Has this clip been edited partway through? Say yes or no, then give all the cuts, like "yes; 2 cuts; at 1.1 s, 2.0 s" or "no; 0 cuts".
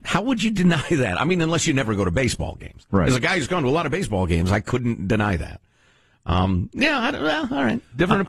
no; 0 cuts